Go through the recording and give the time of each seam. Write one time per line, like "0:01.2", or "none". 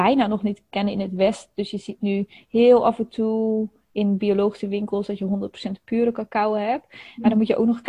none